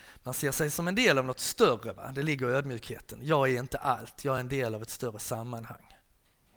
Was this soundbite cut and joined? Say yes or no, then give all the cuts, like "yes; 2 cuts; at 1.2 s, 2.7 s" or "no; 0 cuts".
no; 0 cuts